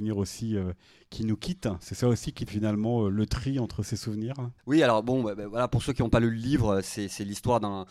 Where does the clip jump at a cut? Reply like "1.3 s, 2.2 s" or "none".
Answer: 2.5 s, 4.6 s